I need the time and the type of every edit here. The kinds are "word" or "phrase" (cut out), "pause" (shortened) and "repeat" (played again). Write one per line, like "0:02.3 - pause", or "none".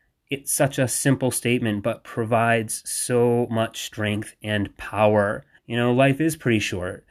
0:05.6 - pause

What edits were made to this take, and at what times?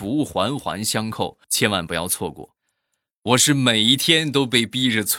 0:01.4 - pause

